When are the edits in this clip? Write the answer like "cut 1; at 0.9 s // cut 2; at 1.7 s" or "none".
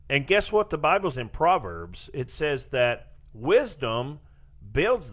cut 1; at 1.1 s // cut 2; at 2.3 s